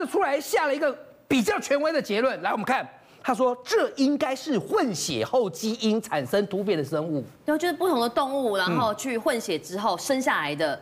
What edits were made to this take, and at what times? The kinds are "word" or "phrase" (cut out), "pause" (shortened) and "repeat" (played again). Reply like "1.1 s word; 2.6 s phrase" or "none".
none